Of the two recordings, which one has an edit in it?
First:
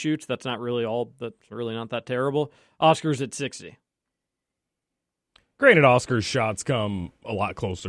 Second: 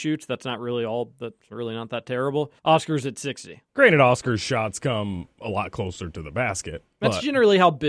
second; 2 cuts; at 2.6 s, 3.7 s

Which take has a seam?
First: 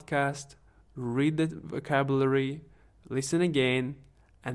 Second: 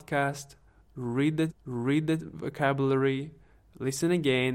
second; 1 cut; at 1.5 s

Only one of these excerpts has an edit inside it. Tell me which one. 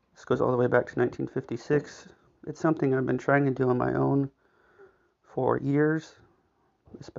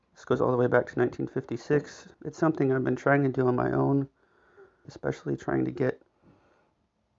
second; 2 cuts; at 2.1 s, 4.8 s

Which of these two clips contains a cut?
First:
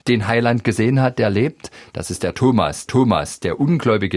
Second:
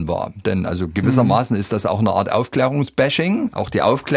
first; 1 cut; at 2.9 s

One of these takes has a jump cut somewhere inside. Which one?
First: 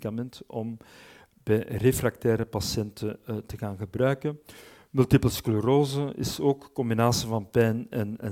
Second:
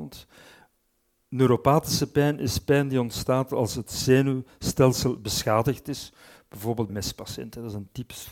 second; 1 cut; at 6.9 s

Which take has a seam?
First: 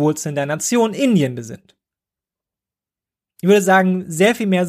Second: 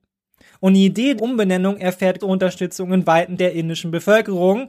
second; 3 cuts; at 1.2 s, 2.2 s, 3.4 s

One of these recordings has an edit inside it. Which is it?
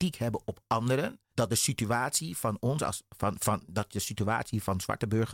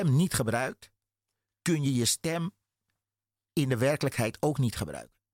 first; 1 cut; at 1.3 s

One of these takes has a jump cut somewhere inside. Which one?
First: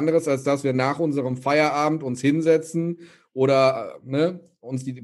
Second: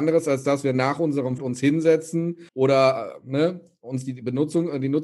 second; 2 cuts; at 1.4 s, 2.5 s

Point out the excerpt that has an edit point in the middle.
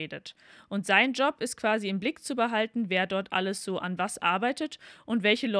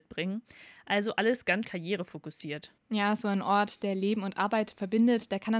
second; 2 cuts; at 1.6 s, 2.8 s

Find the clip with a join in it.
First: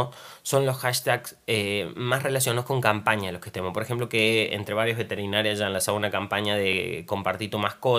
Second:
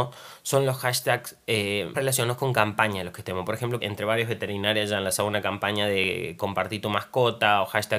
second; 2 cuts; at 1.9 s, 3.8 s

